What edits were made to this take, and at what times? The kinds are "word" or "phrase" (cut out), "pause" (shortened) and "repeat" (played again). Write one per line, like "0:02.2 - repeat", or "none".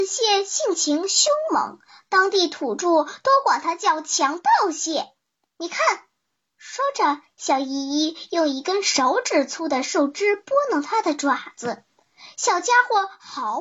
none